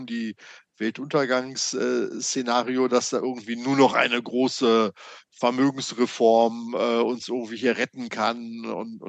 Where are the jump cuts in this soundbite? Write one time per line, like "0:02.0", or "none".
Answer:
none